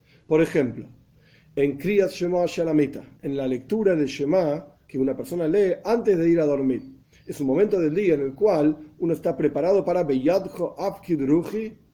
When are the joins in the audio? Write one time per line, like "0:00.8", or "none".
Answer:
none